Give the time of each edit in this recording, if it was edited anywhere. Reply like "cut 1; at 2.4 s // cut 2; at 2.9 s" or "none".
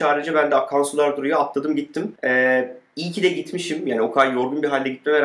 cut 1; at 2.2 s